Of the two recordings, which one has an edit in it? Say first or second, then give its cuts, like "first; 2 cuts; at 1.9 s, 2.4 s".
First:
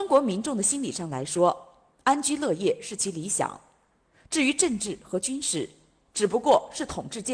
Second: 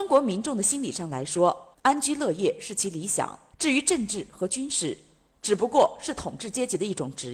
second; 2 cuts; at 1.7 s, 3.5 s